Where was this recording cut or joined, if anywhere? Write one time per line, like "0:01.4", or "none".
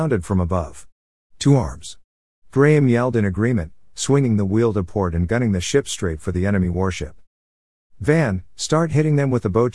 none